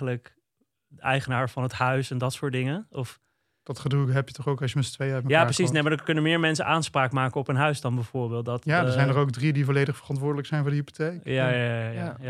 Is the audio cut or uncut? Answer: uncut